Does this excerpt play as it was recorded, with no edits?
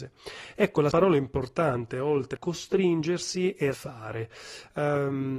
no; 3 cuts; at 0.9 s, 2.4 s, 3.7 s

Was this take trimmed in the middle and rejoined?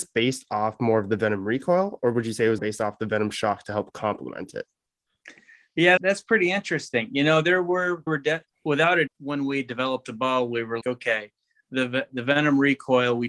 yes; 6 cuts; at 2.6 s, 6.0 s, 8.1 s, 8.5 s, 9.1 s, 10.8 s

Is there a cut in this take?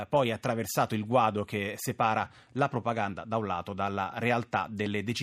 no; 0 cuts

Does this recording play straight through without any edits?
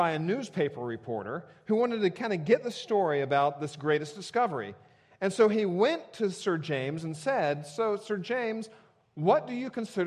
yes; 0 cuts

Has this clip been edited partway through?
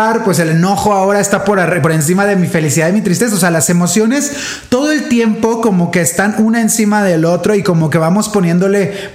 no; 0 cuts

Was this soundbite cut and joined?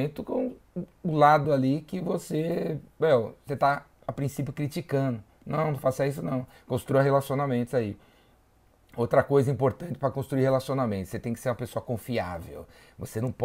no; 0 cuts

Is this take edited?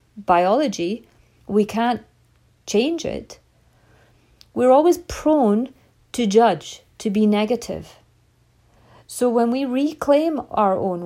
no; 0 cuts

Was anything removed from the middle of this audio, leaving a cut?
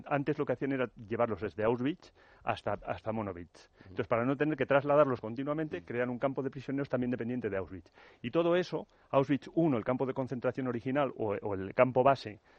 no; 0 cuts

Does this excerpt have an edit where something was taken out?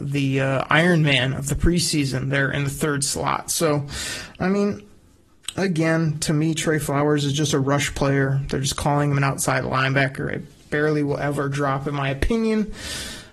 no; 0 cuts

